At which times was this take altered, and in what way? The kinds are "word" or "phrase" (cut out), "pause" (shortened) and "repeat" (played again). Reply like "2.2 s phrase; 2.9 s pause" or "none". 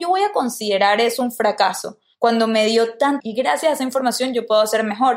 3.2 s word